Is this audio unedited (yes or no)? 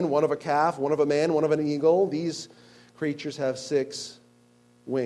yes